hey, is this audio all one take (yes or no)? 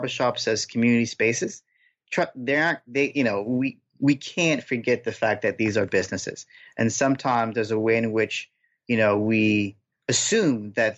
yes